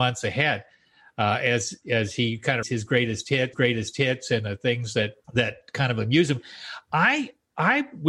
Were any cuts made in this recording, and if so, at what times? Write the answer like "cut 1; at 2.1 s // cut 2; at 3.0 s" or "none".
cut 1; at 2.6 s // cut 2; at 3.5 s // cut 3; at 5.2 s